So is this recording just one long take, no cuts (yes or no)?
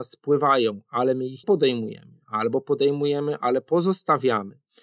no